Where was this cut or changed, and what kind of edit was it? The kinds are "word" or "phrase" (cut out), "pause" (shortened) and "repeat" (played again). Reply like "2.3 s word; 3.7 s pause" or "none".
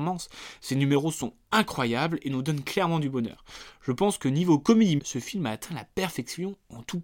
5.0 s word